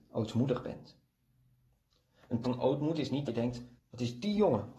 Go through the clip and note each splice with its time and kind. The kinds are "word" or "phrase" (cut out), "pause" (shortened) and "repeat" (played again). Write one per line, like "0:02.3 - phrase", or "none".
0:02.4 - word
0:03.3 - word
0:03.8 - word